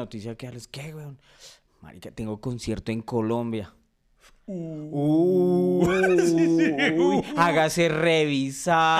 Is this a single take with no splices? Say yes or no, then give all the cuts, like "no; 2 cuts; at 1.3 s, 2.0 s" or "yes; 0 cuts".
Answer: yes; 0 cuts